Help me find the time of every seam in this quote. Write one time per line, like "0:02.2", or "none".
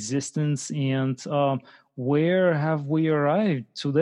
none